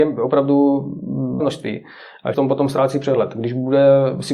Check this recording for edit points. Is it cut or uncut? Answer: cut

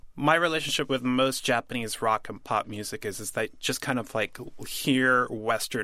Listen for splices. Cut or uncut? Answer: uncut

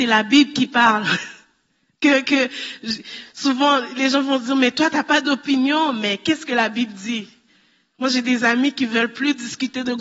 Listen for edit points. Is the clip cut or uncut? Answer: uncut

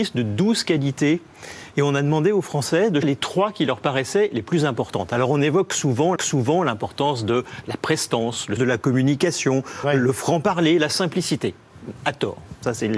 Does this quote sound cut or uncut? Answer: cut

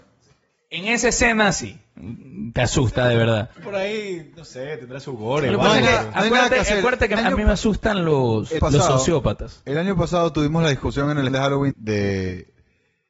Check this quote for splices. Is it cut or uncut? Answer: cut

